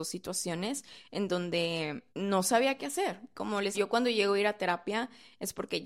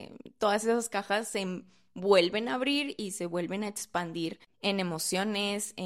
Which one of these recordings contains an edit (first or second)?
first